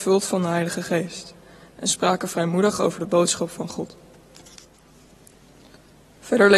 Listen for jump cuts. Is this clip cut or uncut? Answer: uncut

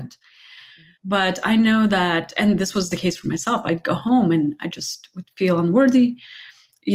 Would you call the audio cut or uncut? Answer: cut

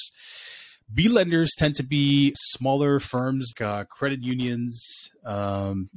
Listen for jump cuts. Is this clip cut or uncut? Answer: cut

